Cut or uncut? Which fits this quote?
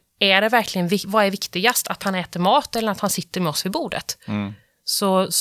uncut